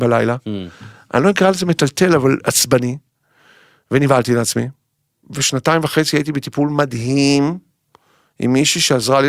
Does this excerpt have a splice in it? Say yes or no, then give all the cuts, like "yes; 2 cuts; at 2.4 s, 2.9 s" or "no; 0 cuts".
no; 0 cuts